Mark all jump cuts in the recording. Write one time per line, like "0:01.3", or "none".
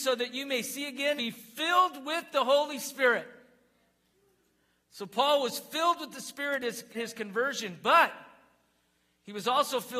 0:01.2
0:06.9